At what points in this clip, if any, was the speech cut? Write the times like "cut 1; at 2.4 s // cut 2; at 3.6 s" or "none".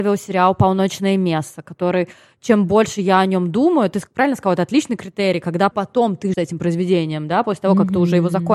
cut 1; at 5.7 s // cut 2; at 6.3 s